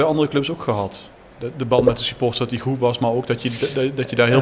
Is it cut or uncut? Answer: uncut